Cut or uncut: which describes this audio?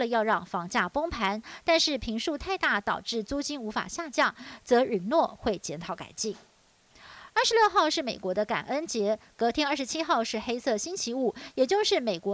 uncut